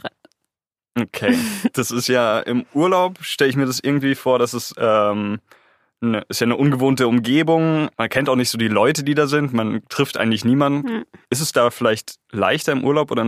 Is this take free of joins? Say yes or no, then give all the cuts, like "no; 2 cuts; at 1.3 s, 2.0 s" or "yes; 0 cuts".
yes; 0 cuts